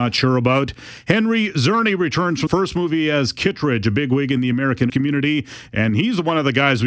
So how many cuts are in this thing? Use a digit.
2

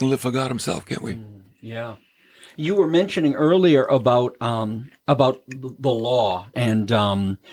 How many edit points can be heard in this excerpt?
1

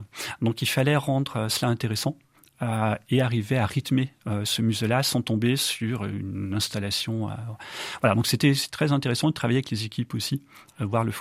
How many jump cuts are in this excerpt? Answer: 0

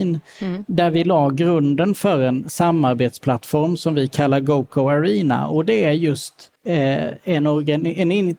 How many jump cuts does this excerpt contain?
1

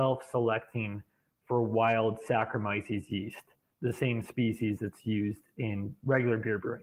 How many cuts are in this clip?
0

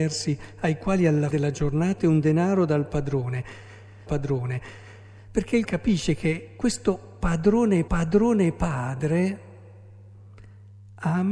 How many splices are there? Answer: 5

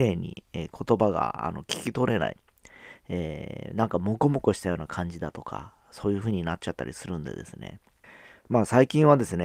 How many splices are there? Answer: 1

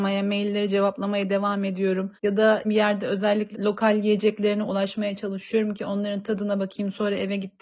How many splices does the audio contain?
3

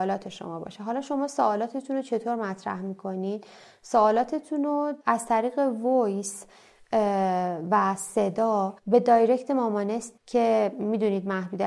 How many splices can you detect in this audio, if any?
3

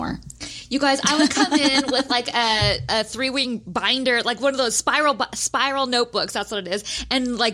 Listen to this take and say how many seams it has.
0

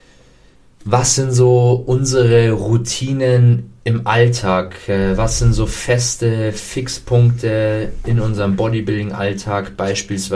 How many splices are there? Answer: 1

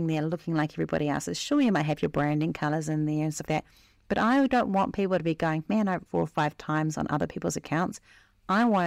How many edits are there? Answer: 2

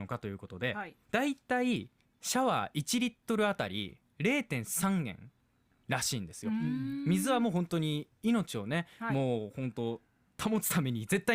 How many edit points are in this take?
2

